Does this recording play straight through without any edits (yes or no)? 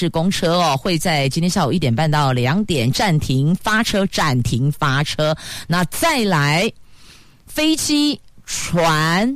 yes